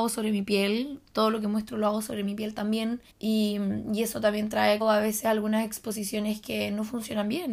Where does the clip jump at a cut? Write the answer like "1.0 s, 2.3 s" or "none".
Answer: 3.1 s, 4.8 s